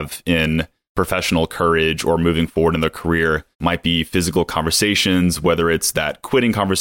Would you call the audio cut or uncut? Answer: cut